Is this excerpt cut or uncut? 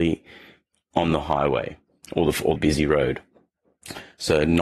cut